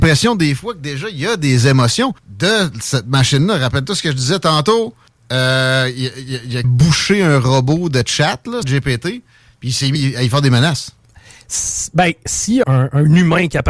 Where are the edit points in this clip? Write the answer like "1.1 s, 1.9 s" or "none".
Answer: 2.2 s, 5.1 s, 6.6 s, 8.6 s, 10.0 s, 12.6 s